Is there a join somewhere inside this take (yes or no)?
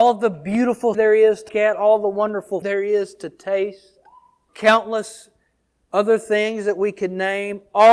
yes